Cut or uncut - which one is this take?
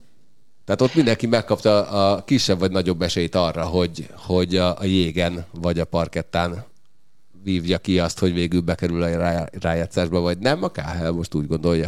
uncut